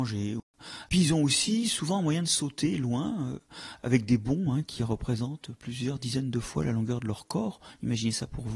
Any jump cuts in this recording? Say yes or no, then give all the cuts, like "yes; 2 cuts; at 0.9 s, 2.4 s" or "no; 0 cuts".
no; 0 cuts